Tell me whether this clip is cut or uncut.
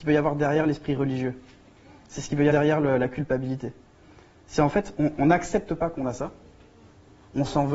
cut